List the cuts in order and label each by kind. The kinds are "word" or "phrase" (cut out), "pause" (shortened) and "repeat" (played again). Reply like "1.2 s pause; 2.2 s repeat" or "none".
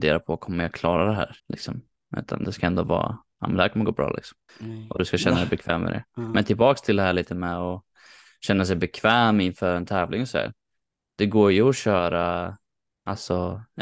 1.4 s pause; 4.5 s pause